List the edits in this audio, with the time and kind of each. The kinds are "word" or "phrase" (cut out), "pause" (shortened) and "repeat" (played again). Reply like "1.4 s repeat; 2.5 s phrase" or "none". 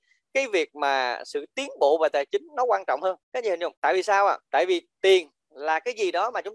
3.2 s pause; 3.8 s pause; 4.5 s pause